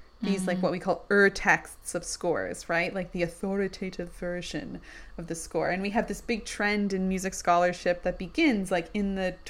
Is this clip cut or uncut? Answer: uncut